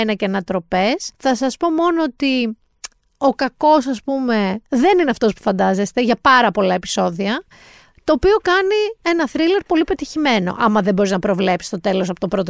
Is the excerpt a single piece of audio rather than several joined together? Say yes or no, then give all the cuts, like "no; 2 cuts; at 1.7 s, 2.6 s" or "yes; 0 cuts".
no; 1 cut; at 1.1 s